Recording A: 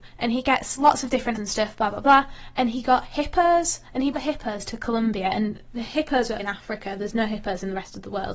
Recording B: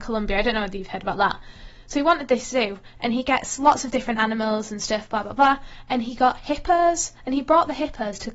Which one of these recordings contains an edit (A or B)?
A